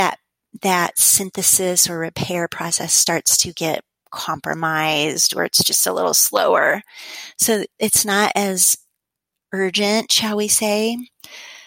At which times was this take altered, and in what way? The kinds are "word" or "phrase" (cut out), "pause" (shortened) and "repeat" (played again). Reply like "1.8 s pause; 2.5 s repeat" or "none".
none